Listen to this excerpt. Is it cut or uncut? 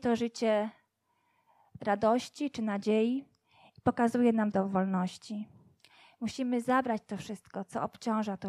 cut